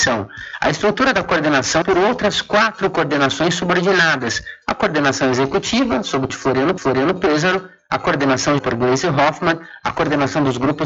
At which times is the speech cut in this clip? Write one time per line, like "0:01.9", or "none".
0:01.8
0:06.3
0:06.8
0:08.6